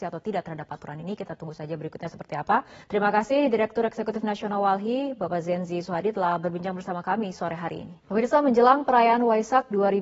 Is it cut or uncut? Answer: cut